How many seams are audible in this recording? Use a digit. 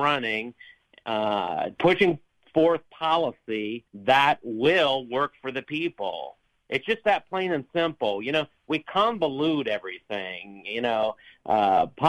2